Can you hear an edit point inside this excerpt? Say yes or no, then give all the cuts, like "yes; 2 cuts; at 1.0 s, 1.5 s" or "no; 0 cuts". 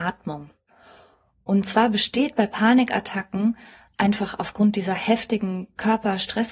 no; 0 cuts